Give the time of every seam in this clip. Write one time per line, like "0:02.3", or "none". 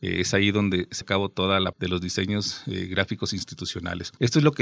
0:01.0
0:01.7